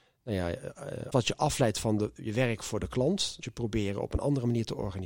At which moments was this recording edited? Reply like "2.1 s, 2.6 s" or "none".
1.1 s, 3.4 s

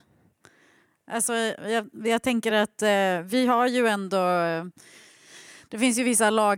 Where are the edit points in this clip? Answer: none

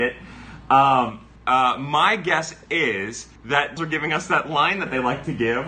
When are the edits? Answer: 1.4 s, 3.4 s, 3.8 s

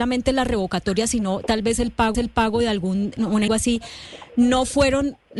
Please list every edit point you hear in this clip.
2.1 s, 3.2 s, 3.5 s

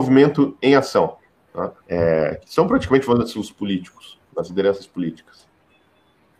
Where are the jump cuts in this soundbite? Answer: 1.8 s, 4.3 s

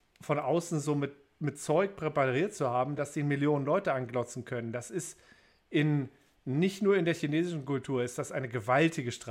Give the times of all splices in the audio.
none

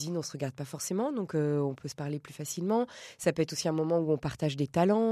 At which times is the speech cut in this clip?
none

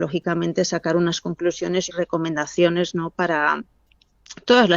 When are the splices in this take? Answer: 1.9 s

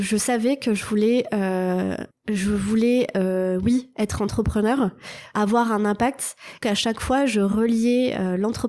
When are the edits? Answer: 2.1 s, 6.6 s

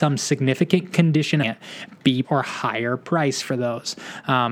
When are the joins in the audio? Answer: 1.4 s, 2.2 s

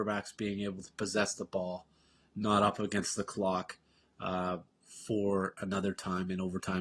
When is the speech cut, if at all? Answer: none

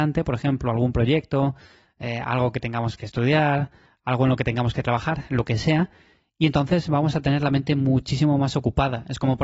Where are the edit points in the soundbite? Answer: none

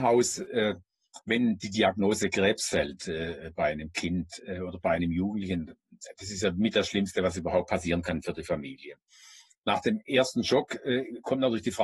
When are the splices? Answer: none

